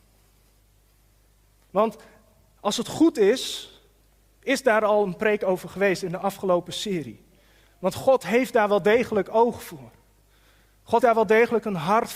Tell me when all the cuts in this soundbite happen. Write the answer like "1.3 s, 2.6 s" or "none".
11.0 s

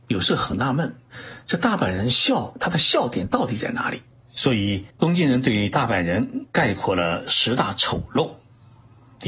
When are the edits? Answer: 4.1 s, 4.9 s

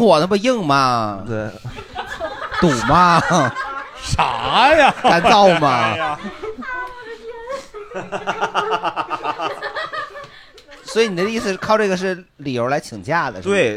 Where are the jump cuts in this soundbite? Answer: none

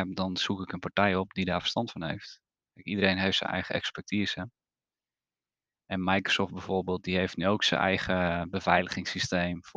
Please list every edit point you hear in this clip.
none

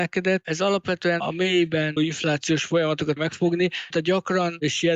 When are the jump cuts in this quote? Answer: 1.2 s, 2.0 s, 3.2 s, 3.9 s

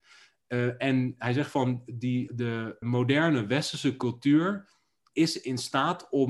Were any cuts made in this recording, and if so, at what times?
2.3 s, 2.8 s, 5.1 s

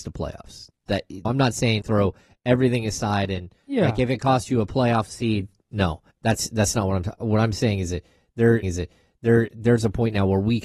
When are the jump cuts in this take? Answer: 1.2 s, 1.8 s, 6.1 s, 8.6 s

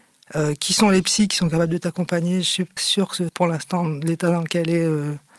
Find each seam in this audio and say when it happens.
2.8 s, 3.3 s

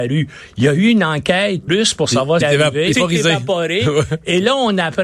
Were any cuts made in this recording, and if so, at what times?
1.7 s, 2.4 s, 2.9 s

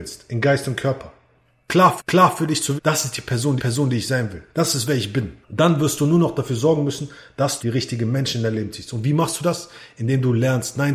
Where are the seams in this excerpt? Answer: 2.0 s, 2.8 s, 3.6 s, 4.5 s, 5.4 s, 7.6 s

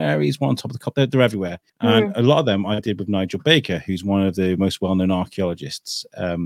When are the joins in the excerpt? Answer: 1.7 s

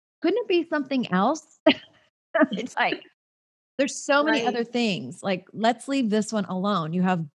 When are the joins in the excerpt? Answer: 2.7 s

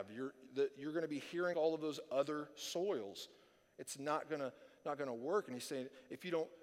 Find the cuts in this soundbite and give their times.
1.5 s

